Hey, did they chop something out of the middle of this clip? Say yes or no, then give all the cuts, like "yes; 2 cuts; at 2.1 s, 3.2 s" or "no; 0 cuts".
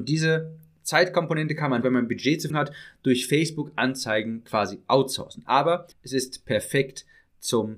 yes; 3 cuts; at 1.8 s, 2.5 s, 5.9 s